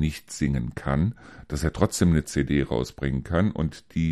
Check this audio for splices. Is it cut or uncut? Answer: uncut